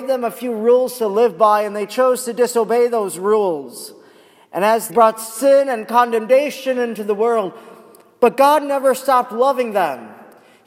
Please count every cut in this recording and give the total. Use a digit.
1